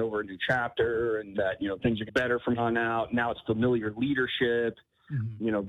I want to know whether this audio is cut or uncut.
cut